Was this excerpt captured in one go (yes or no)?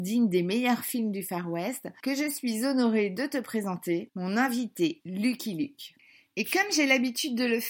yes